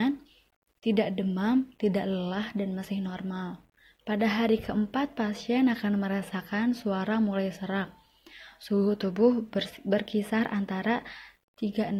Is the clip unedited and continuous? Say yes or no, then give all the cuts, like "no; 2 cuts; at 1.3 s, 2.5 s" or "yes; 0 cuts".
yes; 0 cuts